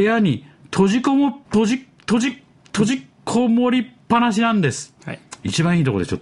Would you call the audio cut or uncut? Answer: cut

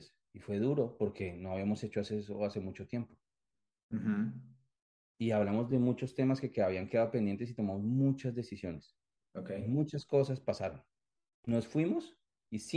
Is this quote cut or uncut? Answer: uncut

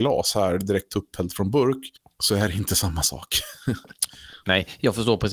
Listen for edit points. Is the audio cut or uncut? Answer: uncut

